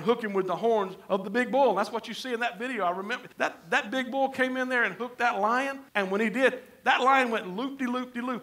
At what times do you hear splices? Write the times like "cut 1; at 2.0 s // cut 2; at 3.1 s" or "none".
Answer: cut 1; at 3.3 s // cut 2; at 5.9 s